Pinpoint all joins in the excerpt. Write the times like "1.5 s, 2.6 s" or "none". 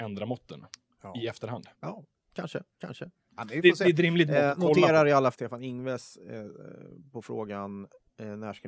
1.7 s, 2.7 s, 5.3 s